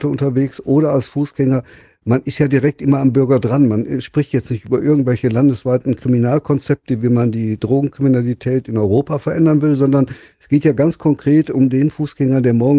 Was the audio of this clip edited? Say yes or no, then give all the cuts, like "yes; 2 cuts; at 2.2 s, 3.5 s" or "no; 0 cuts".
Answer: no; 0 cuts